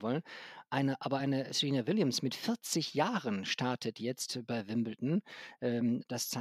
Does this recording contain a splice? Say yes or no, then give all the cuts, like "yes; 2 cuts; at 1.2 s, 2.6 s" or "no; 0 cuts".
no; 0 cuts